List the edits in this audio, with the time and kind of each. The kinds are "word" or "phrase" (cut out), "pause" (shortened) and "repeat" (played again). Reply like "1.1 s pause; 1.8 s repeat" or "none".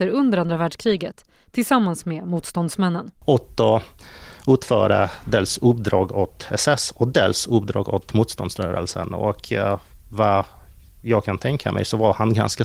3.2 s pause